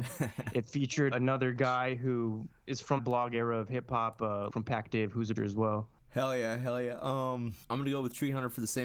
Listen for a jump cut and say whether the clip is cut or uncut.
cut